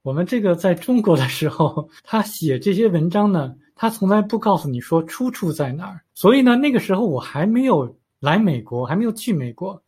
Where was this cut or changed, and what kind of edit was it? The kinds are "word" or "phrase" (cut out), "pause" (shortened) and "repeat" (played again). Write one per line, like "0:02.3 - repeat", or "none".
0:02.0 - pause
0:06.1 - pause